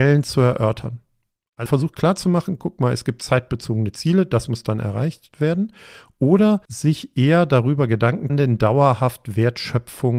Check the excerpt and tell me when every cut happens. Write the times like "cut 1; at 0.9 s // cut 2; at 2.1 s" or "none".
cut 1; at 1.7 s // cut 2; at 6.7 s // cut 3; at 8.3 s